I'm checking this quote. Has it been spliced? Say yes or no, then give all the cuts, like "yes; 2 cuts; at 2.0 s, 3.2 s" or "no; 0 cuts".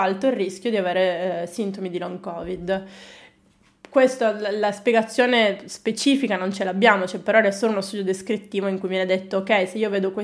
no; 0 cuts